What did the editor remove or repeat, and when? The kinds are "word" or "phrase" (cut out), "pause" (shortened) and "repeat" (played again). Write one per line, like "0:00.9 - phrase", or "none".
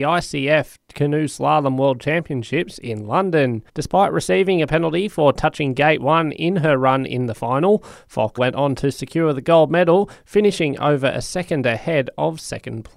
0:03.7 - pause
0:08.4 - word

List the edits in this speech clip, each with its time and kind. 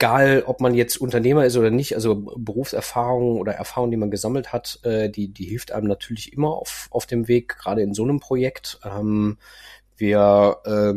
none

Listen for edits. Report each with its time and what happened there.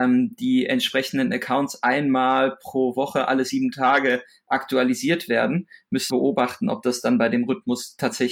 0:06.1 - word

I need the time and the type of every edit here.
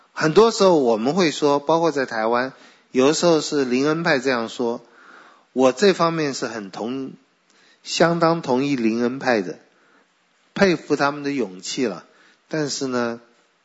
none

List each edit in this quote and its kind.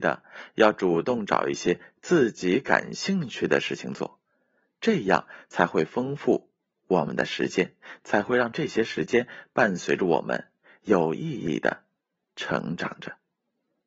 none

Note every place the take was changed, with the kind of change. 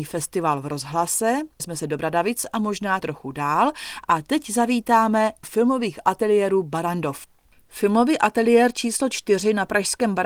0:01.6 - word
0:03.0 - word
0:05.4 - word

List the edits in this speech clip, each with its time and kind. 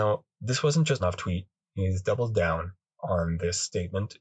0:01.0 - phrase

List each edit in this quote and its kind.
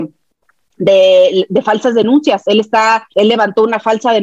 0:03.1 - pause

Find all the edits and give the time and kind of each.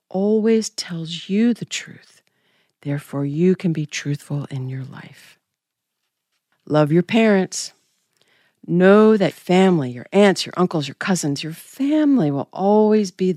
0:09.3 - word

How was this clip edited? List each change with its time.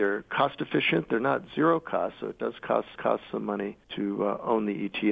0:03.0 - repeat
0:03.8 - pause

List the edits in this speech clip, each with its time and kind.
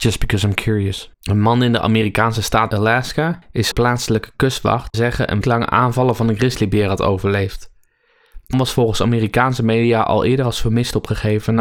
0:03.7 - phrase
0:04.9 - phrase
0:05.4 - word
0:08.5 - word

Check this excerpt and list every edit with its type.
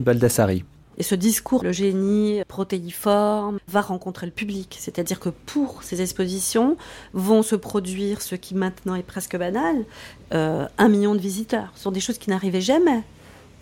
0:01.6 - word
0:02.4 - word
0:03.6 - word

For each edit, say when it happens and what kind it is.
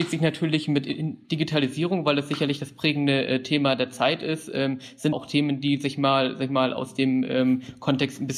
0:05.1 - word

